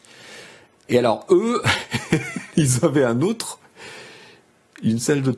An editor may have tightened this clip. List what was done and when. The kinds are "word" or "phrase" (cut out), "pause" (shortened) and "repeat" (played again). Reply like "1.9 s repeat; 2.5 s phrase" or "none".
none